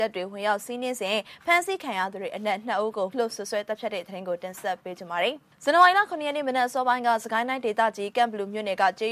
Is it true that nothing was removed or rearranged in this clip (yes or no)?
no